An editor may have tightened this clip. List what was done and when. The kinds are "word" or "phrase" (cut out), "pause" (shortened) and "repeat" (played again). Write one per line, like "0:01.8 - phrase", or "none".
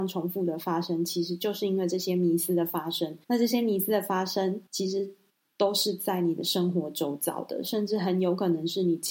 0:03.2 - pause
0:04.7 - pause
0:05.3 - pause